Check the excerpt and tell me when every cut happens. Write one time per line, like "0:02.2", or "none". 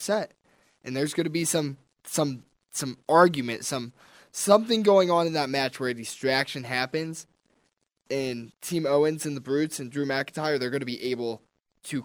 none